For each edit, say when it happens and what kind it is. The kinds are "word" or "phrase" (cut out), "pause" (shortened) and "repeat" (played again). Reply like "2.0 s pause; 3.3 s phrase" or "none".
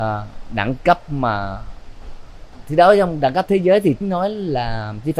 4.0 s word